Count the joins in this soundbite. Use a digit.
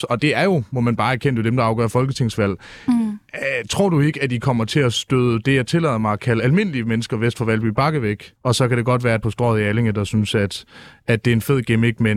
2